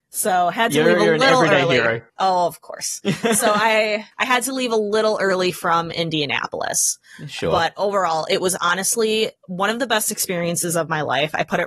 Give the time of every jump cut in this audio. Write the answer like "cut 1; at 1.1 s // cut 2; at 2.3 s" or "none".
cut 1; at 2.1 s // cut 2; at 4.1 s // cut 3; at 9.4 s